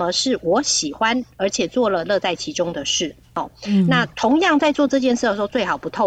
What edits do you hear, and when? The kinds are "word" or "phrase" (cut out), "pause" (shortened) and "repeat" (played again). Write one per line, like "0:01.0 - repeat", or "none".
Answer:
0:03.2 - pause

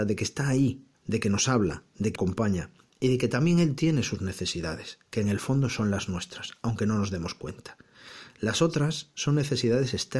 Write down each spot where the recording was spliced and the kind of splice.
0:00.9 - pause
0:02.1 - word

